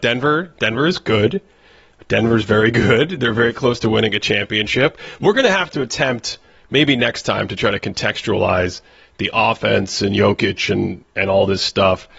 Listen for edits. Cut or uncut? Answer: uncut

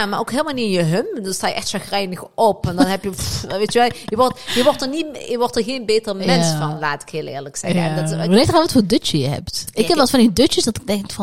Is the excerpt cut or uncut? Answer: uncut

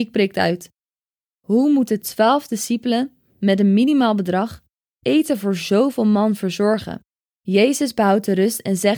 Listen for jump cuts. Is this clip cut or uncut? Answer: uncut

